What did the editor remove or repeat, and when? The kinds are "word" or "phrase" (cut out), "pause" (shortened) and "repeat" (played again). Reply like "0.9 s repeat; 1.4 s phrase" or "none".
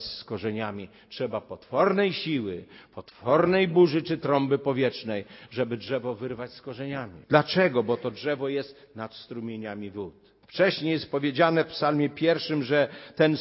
7.2 s pause; 10.4 s pause